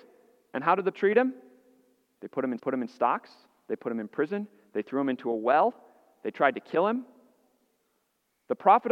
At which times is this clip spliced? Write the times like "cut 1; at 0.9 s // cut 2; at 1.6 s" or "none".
cut 1; at 0.9 s // cut 2; at 2.6 s